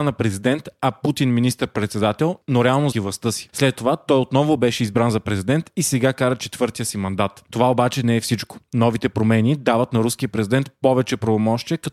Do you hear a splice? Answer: yes; 1 cut; at 2.9 s

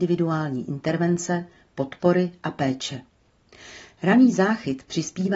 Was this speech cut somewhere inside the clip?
no; 0 cuts

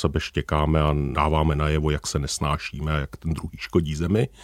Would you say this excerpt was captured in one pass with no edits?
yes; 0 cuts

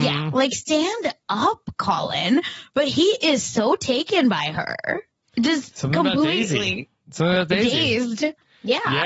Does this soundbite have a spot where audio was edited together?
yes; 1 cut; at 5.2 s

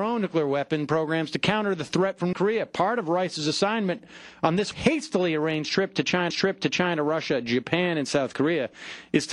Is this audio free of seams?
no; 3 cuts; at 2.3 s, 4.7 s, 6.3 s

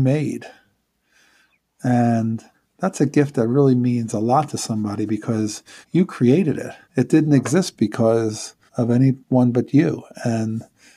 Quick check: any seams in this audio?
yes; 5 cuts; at 2.5 s, 5.8 s, 6.8 s, 8.7 s, 9.2 s

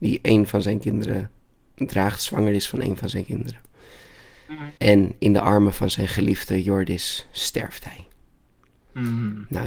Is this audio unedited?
no; 1 cut; at 4.8 s

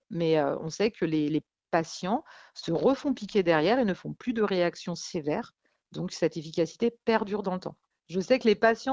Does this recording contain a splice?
no; 0 cuts

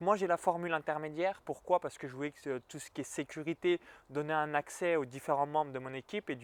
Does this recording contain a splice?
no; 0 cuts

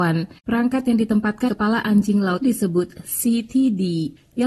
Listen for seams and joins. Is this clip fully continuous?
no; 2 cuts; at 1.5 s, 2.4 s

